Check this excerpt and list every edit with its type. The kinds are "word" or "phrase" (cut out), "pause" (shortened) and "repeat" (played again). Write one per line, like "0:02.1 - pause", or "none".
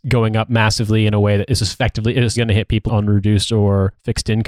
0:02.4 - word
0:02.9 - word